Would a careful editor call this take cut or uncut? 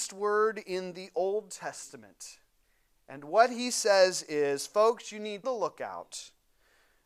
cut